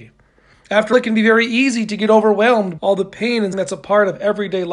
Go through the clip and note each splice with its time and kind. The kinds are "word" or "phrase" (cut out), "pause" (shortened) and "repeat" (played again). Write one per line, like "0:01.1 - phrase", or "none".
0:00.9 - word
0:02.8 - word
0:03.5 - word